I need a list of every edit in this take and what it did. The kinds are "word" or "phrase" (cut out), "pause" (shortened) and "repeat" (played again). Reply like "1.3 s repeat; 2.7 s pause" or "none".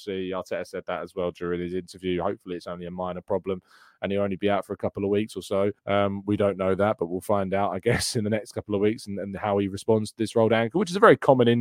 5.8 s pause